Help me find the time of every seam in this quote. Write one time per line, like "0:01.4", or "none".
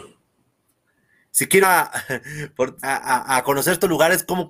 0:01.6
0:02.8